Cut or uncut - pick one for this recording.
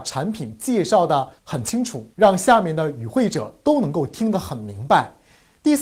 cut